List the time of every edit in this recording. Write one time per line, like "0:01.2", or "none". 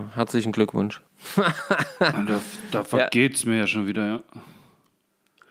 none